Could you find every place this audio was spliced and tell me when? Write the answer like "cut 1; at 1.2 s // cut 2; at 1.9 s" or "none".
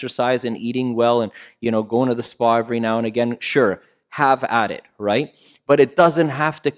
none